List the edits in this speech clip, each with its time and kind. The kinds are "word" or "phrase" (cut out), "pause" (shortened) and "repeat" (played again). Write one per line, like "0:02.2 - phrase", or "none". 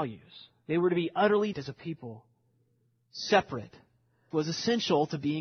0:01.5 - word
0:04.3 - word